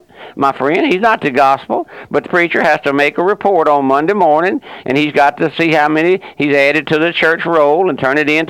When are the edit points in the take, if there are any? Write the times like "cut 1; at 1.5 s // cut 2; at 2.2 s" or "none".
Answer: cut 1; at 2.3 s